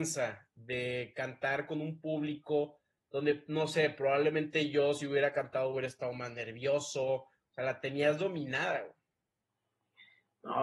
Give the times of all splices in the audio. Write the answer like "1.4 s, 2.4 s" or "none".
none